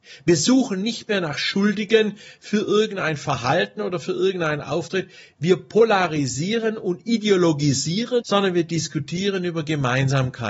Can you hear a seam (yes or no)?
yes